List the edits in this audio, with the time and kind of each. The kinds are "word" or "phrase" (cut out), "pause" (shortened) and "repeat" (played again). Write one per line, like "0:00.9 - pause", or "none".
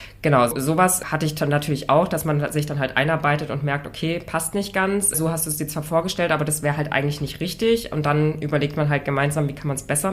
none